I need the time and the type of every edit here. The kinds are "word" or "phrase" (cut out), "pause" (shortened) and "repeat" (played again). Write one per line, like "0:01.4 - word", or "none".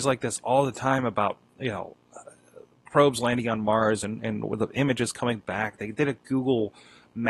none